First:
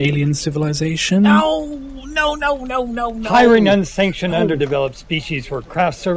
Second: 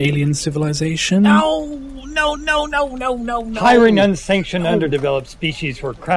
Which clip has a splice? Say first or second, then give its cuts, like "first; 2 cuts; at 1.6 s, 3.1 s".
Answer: second; 1 cut; at 2.4 s